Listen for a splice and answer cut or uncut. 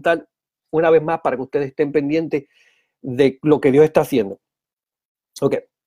uncut